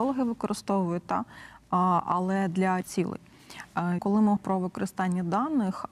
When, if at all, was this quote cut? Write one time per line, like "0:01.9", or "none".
0:02.8
0:04.0
0:04.4